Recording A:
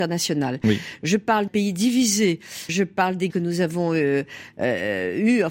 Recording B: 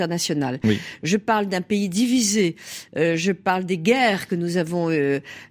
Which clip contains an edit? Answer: A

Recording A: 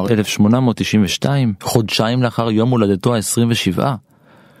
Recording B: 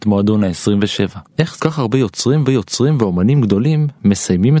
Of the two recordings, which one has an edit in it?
B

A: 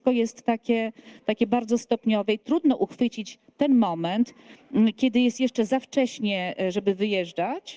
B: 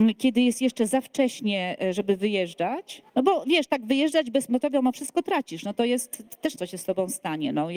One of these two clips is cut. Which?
B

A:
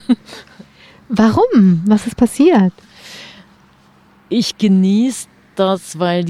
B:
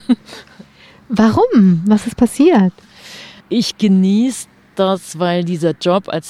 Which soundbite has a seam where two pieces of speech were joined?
B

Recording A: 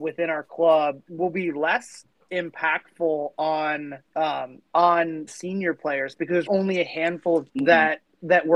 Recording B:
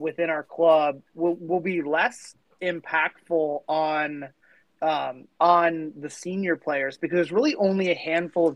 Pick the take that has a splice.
A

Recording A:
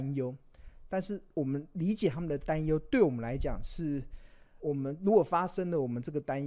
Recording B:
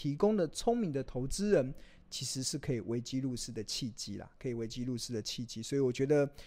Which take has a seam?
A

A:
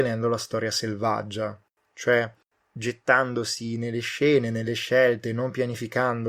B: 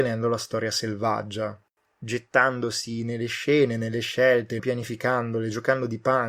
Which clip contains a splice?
B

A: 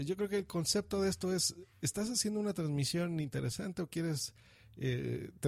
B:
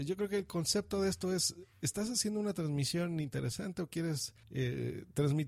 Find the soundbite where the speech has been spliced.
B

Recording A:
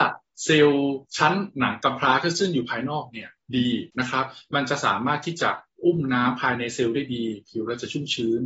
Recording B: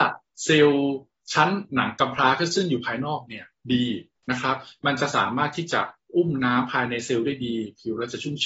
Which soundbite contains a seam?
A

